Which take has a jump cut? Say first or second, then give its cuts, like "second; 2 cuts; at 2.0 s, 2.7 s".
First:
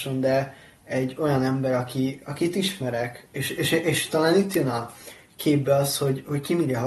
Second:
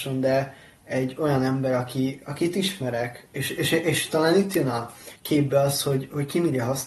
second; 1 cut; at 5.2 s